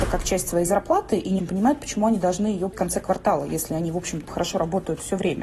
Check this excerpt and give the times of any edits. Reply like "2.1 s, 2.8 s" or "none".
1.4 s, 2.7 s, 4.3 s